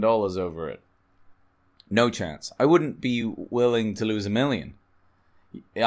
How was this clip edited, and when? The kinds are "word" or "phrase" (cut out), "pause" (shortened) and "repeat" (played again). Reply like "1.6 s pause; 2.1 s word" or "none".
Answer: none